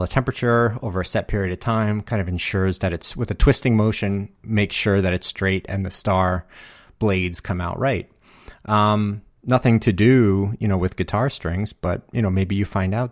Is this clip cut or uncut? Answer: uncut